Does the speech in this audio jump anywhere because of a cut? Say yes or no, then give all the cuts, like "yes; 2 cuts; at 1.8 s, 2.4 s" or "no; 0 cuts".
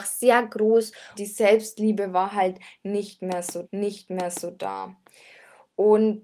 yes; 2 cuts; at 1.2 s, 3.6 s